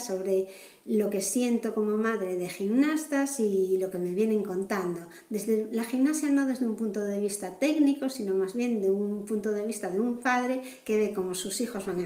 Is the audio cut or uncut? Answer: uncut